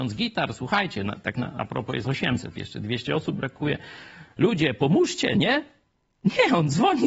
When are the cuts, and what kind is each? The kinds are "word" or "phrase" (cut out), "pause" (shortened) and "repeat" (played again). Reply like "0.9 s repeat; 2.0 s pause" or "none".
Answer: none

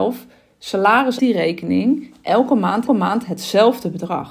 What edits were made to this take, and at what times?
1.2 s phrase; 2.9 s repeat

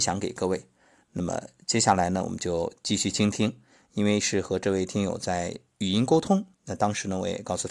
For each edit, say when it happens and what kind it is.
6.5 s pause

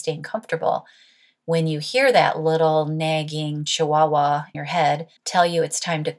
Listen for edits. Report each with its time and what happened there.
4.5 s word; 5.2 s pause

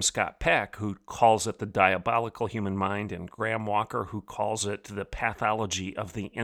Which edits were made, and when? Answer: none

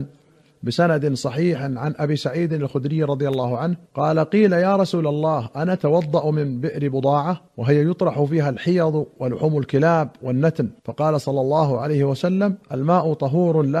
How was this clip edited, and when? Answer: 3.9 s pause; 7.5 s pause; 10.8 s pause; 12.6 s pause

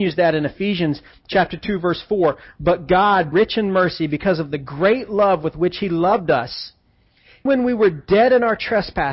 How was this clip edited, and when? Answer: 3.3 s word; 7.5 s word

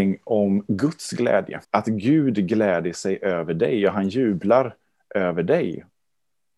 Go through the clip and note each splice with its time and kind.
1.6 s pause

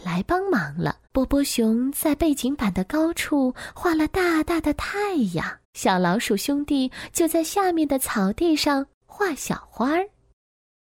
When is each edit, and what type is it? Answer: 1.1 s pause; 5.6 s pause

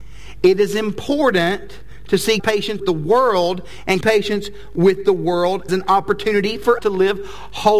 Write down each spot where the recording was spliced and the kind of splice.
2.4 s word; 2.8 s word; 4.0 s word; 5.7 s word; 6.8 s word

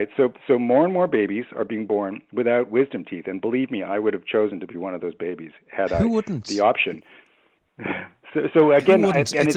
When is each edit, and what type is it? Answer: none

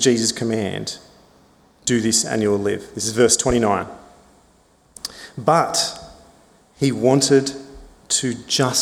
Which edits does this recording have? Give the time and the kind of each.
none

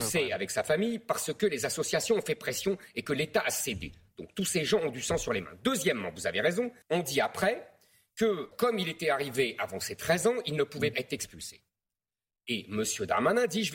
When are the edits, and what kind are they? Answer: 6.8 s pause; 8.5 s word; 10.9 s word

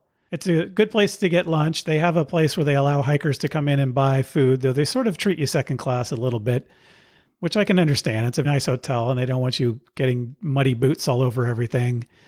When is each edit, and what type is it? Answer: 8.4 s word

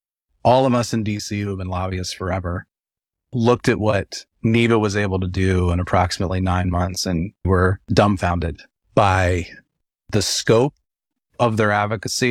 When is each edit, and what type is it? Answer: 4.3 s pause; 7.4 s word

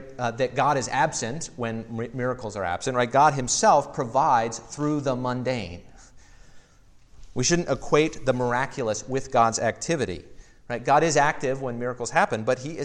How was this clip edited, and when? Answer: none

